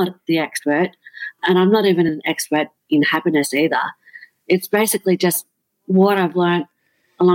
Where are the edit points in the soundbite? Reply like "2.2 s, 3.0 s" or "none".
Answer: none